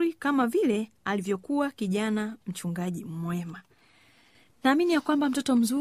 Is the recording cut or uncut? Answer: uncut